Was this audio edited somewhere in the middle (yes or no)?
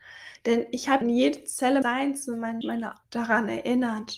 yes